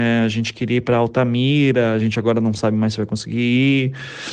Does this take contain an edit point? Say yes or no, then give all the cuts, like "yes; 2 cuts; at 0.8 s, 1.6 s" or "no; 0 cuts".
no; 0 cuts